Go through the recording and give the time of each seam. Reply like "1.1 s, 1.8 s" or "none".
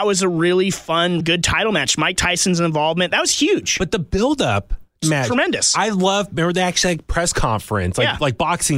1.2 s, 5.0 s